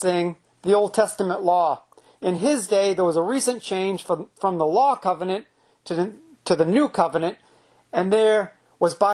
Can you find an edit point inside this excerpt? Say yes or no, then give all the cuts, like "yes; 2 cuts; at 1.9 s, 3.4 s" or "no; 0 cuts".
no; 0 cuts